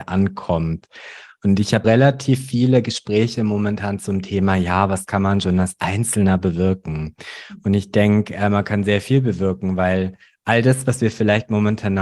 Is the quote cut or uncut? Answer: cut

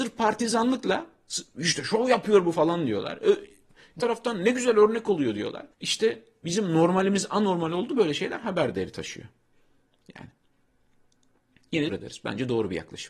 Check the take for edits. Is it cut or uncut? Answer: cut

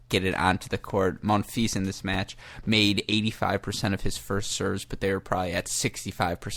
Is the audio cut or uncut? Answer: uncut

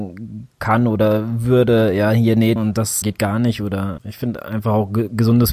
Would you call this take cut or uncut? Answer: cut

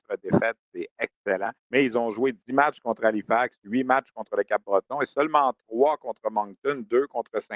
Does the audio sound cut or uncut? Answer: cut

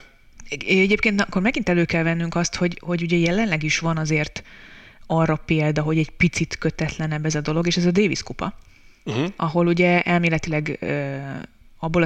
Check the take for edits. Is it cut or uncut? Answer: uncut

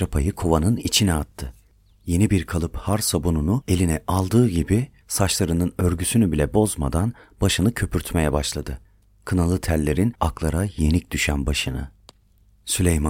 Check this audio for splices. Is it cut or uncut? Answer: uncut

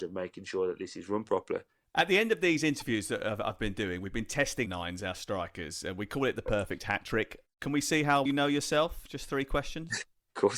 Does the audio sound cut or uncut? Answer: cut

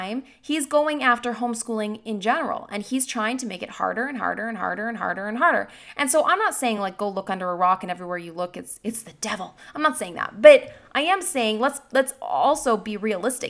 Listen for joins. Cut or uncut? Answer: uncut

